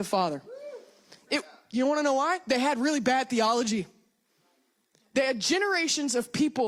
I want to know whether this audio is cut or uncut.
uncut